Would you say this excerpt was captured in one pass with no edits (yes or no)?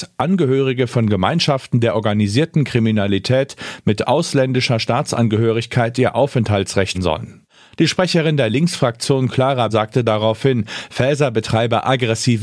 no